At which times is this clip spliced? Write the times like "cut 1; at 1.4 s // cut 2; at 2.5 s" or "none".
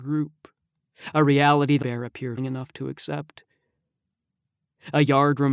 cut 1; at 1.8 s // cut 2; at 2.4 s